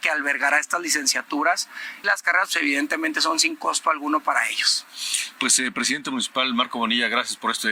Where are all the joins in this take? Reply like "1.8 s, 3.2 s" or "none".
2.0 s